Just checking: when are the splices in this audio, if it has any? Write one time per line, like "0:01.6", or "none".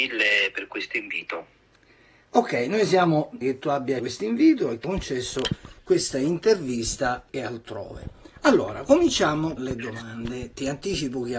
0:03.4
0:04.0
0:04.8
0:07.3
0:09.6

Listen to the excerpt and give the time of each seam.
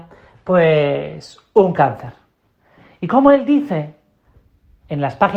none

